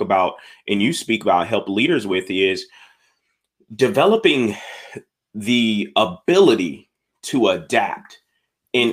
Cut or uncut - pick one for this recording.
uncut